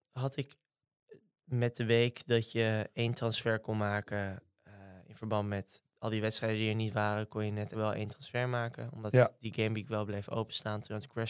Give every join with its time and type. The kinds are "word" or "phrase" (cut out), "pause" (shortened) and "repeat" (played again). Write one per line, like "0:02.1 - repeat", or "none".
0:07.7 - word